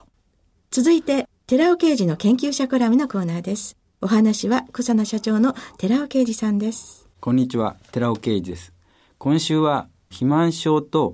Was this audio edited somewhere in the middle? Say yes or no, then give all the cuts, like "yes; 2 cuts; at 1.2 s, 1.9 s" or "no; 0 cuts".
yes; 1 cut; at 7.1 s